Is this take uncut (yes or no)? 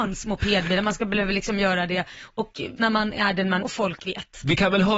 no